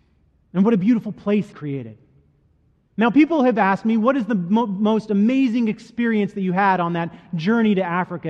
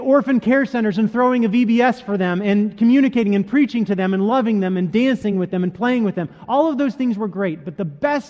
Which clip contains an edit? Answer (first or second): first